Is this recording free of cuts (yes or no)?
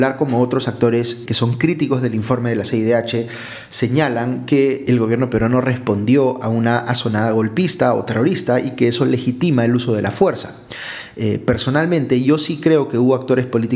no